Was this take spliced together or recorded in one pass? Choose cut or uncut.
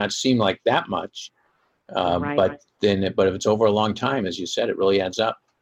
uncut